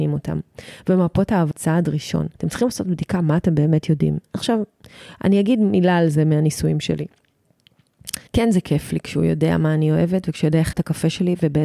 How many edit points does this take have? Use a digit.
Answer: 4